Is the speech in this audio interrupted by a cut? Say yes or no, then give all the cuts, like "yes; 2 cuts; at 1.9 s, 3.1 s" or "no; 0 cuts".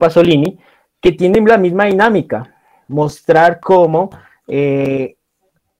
no; 0 cuts